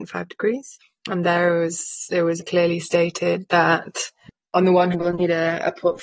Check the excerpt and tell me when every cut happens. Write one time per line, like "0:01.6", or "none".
0:02.4
0:04.9